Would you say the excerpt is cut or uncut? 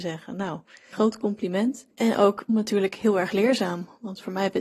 cut